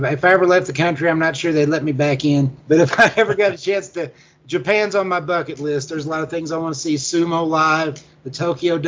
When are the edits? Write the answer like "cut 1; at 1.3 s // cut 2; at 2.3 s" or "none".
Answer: cut 1; at 2.6 s

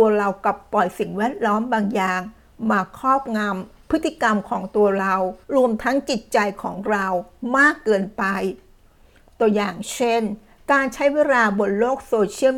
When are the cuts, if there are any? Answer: cut 1; at 5.4 s

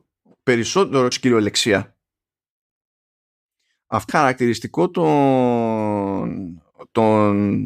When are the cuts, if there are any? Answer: cut 1; at 1.1 s // cut 2; at 4.1 s

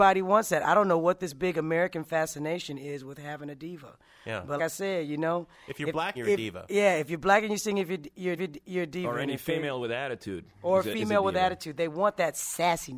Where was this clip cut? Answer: cut 1; at 4.6 s // cut 2; at 6.1 s // cut 3; at 8.4 s

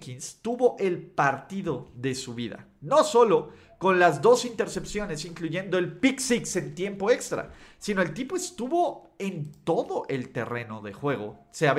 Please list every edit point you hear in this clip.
none

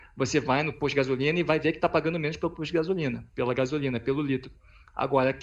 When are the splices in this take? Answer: none

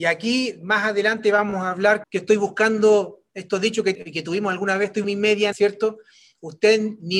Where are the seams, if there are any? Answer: cut 1; at 2.0 s // cut 2; at 3.9 s // cut 3; at 5.0 s // cut 4; at 5.5 s

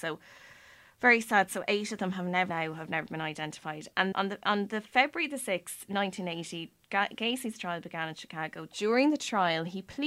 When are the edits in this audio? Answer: cut 1; at 2.5 s // cut 2; at 4.1 s

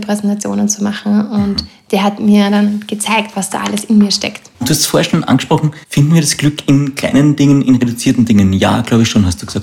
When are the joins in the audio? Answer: cut 1; at 4.5 s // cut 2; at 5.8 s

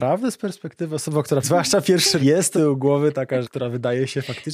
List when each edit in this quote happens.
cut 1; at 1.4 s // cut 2; at 2.2 s // cut 3; at 2.5 s // cut 4; at 3.4 s

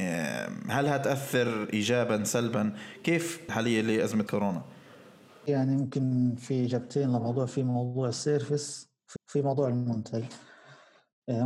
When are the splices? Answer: cut 1; at 3.5 s // cut 2; at 4.3 s // cut 3; at 9.2 s

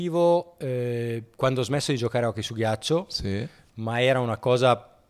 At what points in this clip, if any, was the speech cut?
none

